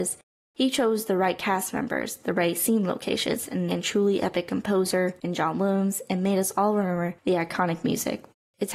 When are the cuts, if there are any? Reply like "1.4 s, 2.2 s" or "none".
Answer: 3.7 s